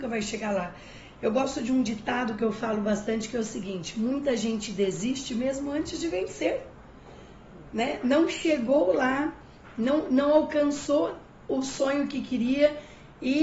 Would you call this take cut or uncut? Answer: uncut